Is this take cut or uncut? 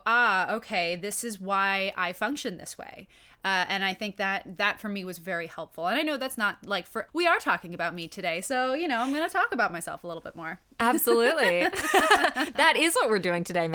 cut